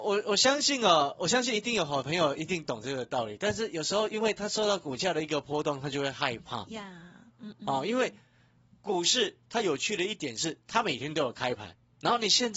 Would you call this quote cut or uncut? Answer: uncut